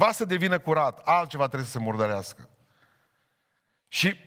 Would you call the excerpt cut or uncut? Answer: uncut